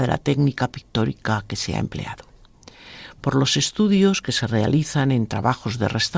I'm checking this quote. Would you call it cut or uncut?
uncut